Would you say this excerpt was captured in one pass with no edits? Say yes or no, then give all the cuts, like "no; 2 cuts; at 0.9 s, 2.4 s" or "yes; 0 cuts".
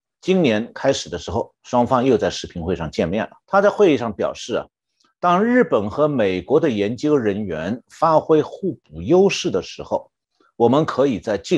no; 1 cut; at 3.4 s